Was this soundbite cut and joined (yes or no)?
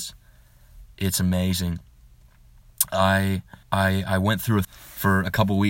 yes